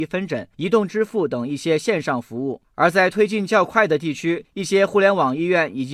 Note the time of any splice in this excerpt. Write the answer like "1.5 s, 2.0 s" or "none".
2.6 s